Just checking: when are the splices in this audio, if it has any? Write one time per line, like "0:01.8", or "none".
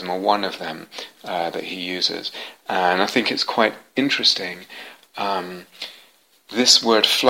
none